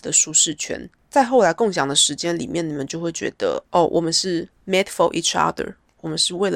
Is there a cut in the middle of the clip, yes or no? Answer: no